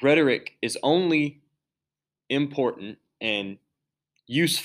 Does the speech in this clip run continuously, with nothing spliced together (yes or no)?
yes